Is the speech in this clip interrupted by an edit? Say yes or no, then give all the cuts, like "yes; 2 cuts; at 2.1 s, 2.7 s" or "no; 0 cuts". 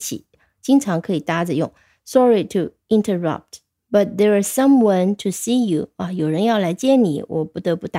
no; 0 cuts